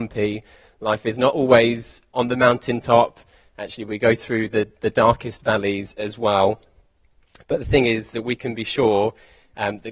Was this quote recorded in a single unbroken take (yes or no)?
yes